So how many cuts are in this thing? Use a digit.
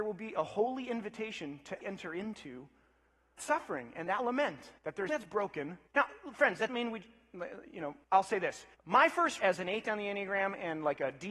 9